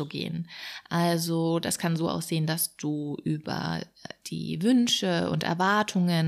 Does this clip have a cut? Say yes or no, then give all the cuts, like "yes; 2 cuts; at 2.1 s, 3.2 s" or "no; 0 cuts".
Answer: no; 0 cuts